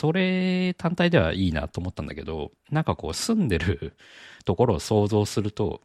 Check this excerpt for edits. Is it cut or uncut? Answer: cut